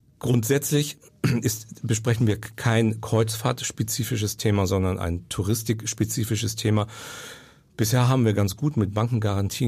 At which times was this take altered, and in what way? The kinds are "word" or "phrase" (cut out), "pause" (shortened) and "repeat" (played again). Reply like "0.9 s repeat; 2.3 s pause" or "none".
none